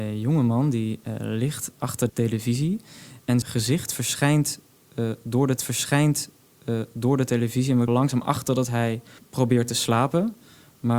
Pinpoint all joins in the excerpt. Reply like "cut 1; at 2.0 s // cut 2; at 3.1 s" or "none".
cut 1; at 2.1 s // cut 2; at 3.4 s // cut 3; at 5.6 s // cut 4; at 7.9 s // cut 5; at 9.2 s